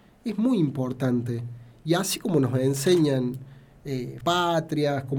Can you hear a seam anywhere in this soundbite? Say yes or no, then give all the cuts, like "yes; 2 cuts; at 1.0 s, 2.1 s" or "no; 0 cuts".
yes; 1 cut; at 4.2 s